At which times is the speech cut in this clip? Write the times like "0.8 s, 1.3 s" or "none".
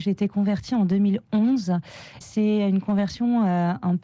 2.2 s